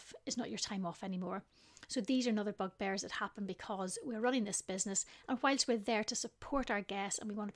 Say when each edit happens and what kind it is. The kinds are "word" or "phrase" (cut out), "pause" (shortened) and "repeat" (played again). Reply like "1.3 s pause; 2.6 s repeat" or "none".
none